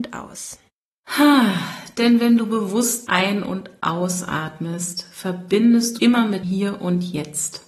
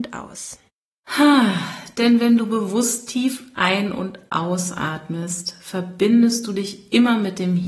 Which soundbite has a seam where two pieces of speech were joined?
first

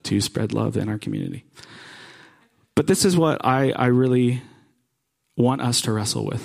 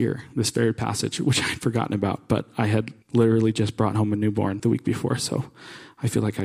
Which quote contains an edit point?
second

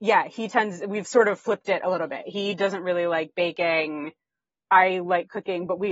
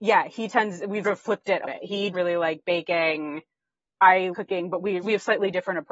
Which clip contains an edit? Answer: second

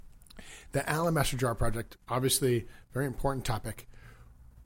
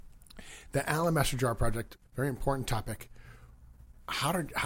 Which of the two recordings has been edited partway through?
second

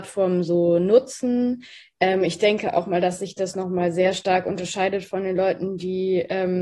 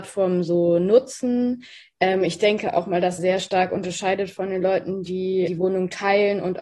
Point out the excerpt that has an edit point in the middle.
second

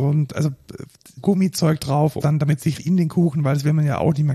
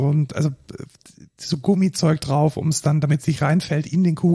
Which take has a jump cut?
first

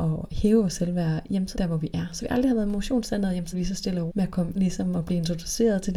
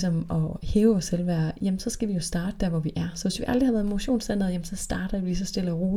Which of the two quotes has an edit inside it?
first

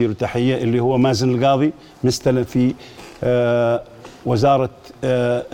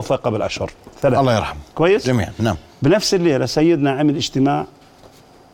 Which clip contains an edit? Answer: second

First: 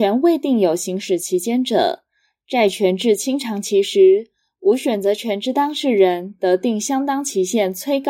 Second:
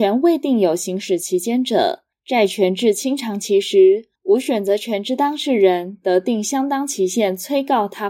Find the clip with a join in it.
second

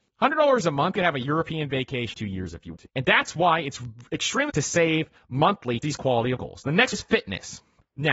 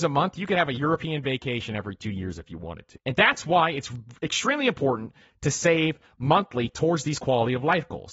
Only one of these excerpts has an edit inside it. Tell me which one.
first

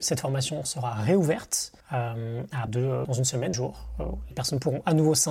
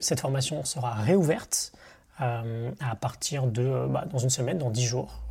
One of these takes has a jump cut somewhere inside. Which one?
first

